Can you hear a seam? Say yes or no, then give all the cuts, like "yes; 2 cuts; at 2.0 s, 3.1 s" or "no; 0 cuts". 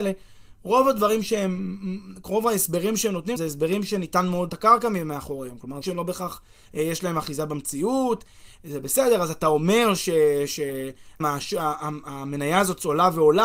yes; 4 cuts; at 3.4 s, 4.5 s, 5.8 s, 11.2 s